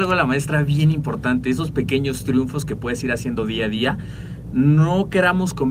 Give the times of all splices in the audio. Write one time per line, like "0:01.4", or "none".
none